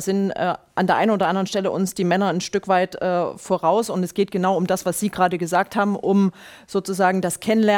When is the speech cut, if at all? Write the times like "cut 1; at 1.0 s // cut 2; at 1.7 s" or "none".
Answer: none